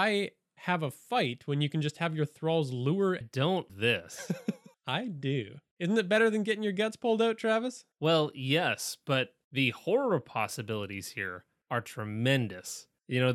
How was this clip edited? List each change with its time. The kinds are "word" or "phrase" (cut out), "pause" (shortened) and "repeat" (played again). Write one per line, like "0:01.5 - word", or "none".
0:03.2 - phrase
0:03.7 - word
0:07.9 - pause